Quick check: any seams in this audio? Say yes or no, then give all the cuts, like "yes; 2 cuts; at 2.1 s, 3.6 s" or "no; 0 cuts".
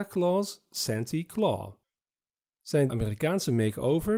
yes; 1 cut; at 2.9 s